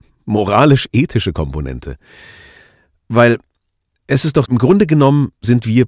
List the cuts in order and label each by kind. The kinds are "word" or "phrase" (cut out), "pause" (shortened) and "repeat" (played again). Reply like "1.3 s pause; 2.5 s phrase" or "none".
4.4 s word